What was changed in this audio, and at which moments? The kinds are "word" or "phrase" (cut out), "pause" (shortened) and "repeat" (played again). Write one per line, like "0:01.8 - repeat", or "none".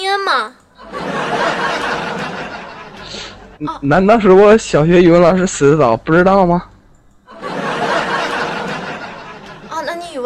0:03.5 - pause